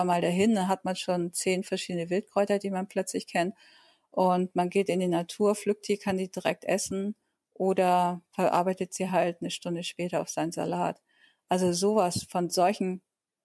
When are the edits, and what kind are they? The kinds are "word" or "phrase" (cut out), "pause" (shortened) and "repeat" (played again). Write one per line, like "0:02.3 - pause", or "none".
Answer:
none